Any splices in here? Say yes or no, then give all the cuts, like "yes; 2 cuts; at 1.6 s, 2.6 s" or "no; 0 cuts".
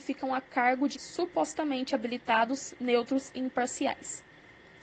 yes; 1 cut; at 0.9 s